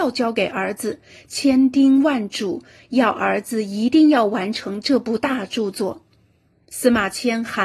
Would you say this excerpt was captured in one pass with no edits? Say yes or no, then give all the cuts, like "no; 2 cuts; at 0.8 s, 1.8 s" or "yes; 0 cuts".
yes; 0 cuts